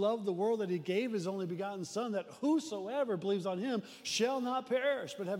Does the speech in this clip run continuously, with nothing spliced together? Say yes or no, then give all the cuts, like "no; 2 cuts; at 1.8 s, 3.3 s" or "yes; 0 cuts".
yes; 0 cuts